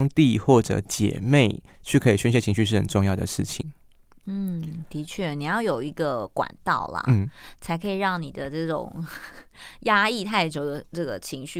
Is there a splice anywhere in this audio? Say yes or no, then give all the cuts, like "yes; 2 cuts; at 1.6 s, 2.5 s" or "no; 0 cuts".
no; 0 cuts